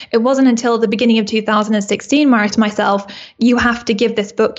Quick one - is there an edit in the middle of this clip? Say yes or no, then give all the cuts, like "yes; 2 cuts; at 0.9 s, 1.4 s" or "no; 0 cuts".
yes; 1 cut; at 2.5 s